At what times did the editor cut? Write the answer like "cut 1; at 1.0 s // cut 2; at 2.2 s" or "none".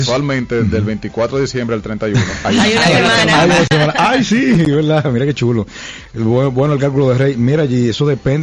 none